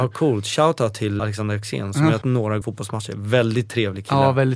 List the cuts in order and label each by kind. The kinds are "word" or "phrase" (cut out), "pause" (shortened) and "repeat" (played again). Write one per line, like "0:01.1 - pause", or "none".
0:01.2 - word
0:02.2 - word
0:02.6 - phrase